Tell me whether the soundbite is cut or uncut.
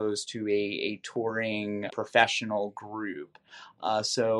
cut